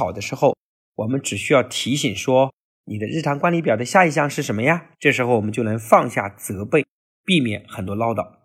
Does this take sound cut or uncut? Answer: cut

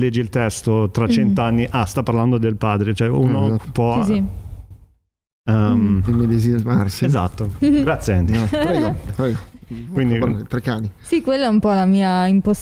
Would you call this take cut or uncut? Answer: uncut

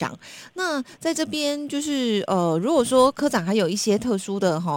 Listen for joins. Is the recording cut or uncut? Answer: uncut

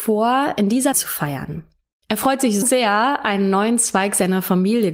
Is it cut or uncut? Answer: cut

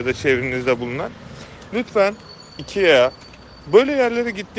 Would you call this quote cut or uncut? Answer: cut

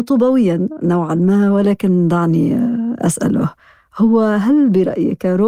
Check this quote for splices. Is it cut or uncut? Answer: uncut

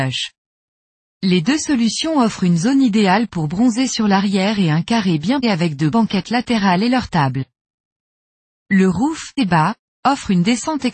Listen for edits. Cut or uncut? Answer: cut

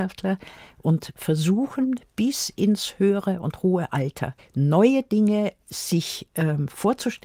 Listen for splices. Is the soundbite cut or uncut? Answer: cut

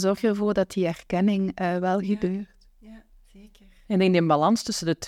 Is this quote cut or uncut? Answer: uncut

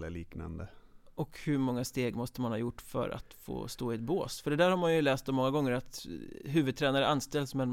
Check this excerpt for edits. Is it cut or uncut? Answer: uncut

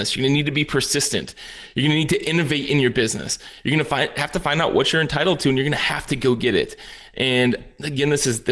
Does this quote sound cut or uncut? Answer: uncut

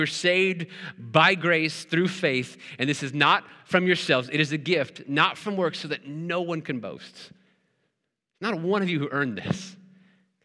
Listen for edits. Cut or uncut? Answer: uncut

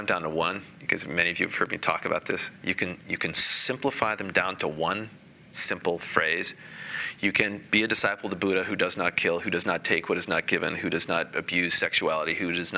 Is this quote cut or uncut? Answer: uncut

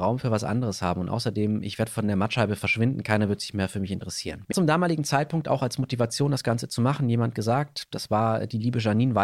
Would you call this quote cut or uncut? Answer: cut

